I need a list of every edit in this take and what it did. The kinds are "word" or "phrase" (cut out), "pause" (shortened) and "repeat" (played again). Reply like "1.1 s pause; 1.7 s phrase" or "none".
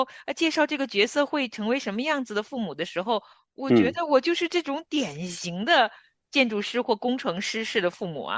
none